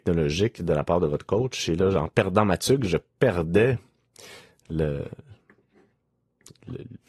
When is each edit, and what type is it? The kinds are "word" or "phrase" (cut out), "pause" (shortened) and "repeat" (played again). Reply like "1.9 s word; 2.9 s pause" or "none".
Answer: none

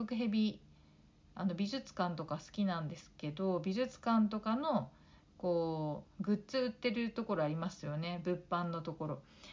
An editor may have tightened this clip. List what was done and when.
6.1 s pause

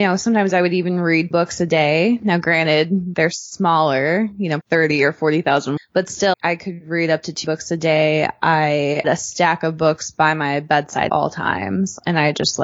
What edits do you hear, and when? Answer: 1.3 s word; 4.6 s word; 5.8 s word; 6.3 s word; 9.0 s word; 11.1 s word

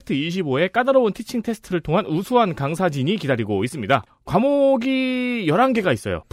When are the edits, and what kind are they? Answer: none

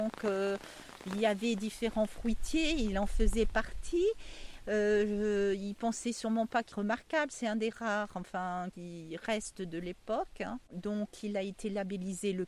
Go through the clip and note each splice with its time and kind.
6.7 s word; 8.7 s word

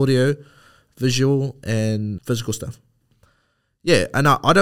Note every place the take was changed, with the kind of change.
2.2 s word

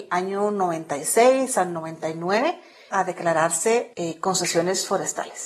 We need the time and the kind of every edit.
2.9 s word; 3.9 s word

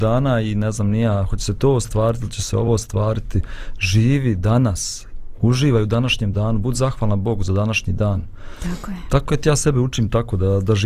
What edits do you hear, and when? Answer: none

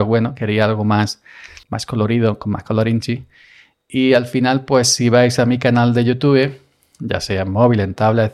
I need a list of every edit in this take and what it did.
1.6 s pause

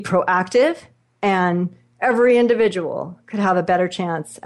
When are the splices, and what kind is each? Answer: none

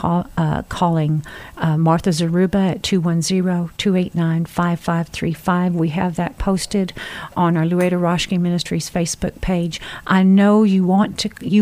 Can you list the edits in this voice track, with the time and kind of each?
none

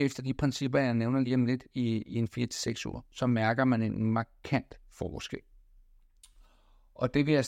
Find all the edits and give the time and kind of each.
none

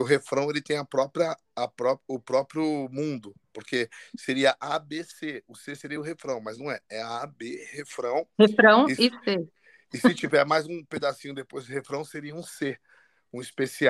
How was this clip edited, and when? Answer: none

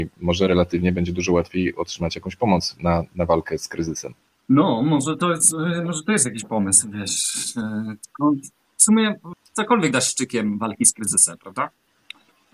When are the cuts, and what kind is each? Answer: none

